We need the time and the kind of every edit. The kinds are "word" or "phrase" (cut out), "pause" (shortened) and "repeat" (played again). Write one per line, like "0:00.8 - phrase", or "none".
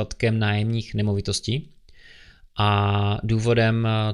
none

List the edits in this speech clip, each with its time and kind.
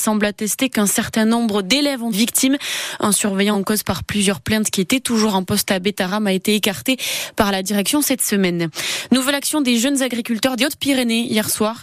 0:02.1 - word
0:03.5 - word

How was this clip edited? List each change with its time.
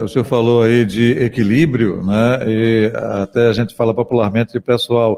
none

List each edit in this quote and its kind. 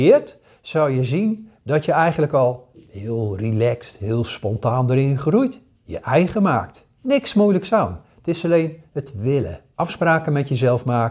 0:02.7 - pause
0:07.0 - pause
0:08.9 - pause
0:09.7 - pause

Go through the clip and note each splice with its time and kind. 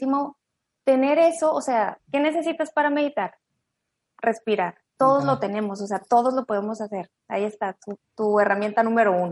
0:02.0 - word
0:05.0 - word

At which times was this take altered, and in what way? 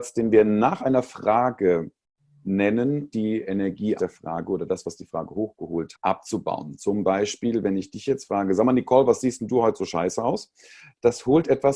0:03.1 - word
0:04.0 - word
0:05.9 - word

